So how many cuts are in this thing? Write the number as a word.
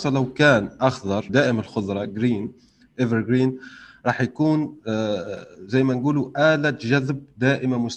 one